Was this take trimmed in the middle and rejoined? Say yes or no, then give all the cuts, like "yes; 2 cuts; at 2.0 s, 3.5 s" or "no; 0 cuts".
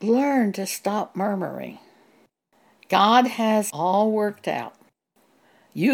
yes; 1 cut; at 3.7 s